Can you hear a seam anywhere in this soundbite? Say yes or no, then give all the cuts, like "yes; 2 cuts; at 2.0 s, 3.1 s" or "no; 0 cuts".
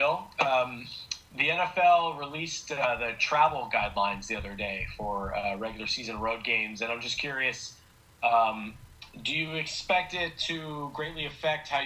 no; 0 cuts